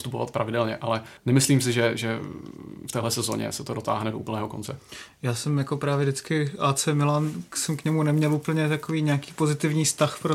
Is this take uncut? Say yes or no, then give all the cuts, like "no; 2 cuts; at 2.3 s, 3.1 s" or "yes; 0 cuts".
no; 1 cut; at 1.2 s